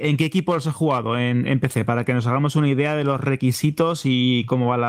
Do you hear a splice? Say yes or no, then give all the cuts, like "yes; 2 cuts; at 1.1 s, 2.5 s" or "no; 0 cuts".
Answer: no; 0 cuts